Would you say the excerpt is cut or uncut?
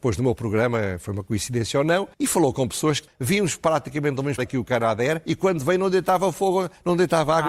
cut